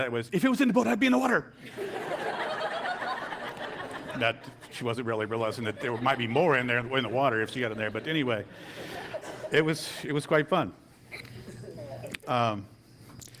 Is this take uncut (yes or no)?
yes